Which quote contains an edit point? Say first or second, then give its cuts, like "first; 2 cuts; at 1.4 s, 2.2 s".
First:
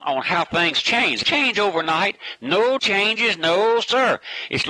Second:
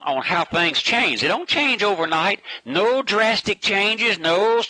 first; 2 cuts; at 1.2 s, 2.8 s